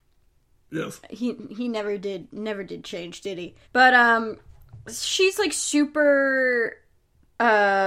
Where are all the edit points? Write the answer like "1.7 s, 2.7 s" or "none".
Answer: 3.6 s, 4.8 s